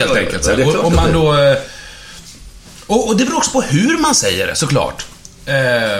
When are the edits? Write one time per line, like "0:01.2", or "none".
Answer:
none